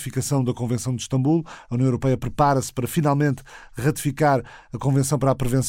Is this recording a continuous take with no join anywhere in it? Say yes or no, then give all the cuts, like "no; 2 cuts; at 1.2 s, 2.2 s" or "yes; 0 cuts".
yes; 0 cuts